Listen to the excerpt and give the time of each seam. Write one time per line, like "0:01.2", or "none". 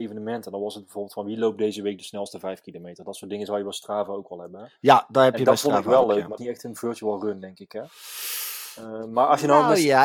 0:06.4